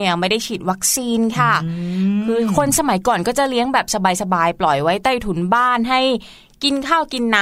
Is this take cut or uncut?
uncut